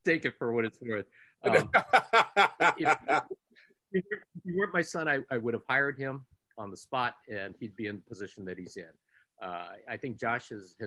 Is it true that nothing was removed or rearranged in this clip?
yes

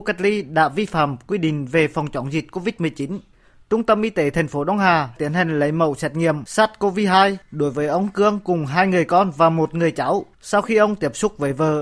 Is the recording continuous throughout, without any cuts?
yes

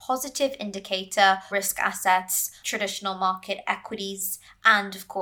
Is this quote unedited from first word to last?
no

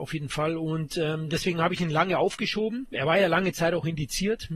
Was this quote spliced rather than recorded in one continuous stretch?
no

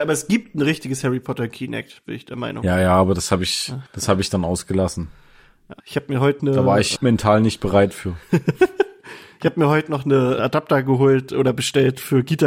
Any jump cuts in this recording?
yes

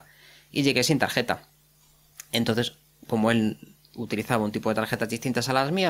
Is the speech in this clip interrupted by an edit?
no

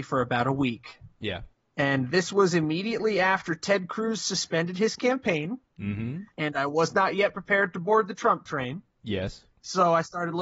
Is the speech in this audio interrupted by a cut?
yes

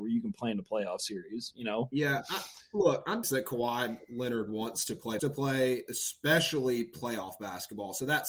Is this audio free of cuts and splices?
no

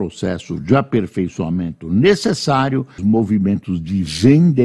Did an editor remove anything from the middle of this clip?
yes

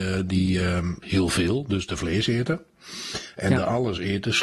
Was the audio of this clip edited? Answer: yes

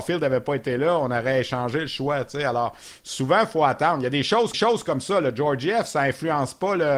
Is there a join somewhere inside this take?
yes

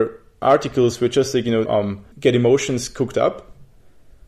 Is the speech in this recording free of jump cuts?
no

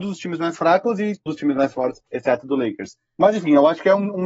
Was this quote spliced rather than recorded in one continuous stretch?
yes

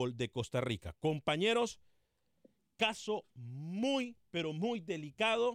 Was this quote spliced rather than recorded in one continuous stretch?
no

